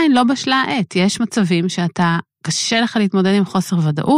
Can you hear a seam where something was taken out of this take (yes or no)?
no